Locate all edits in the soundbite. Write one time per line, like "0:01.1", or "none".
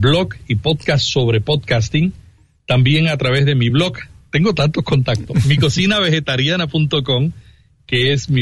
none